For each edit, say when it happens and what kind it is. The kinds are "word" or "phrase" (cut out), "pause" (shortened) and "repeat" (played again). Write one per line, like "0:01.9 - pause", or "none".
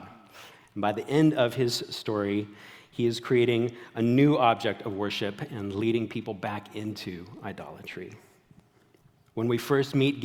none